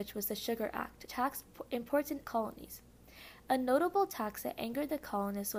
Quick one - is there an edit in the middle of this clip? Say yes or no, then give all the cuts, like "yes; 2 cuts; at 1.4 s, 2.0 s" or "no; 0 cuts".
yes; 2 cuts; at 1.1 s, 2.2 s